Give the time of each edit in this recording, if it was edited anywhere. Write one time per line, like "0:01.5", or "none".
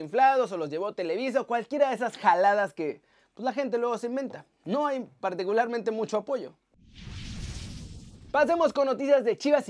none